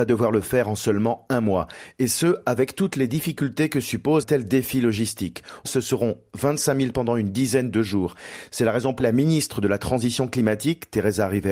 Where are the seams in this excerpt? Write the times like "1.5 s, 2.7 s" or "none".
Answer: 4.2 s, 5.6 s, 6.9 s, 9.0 s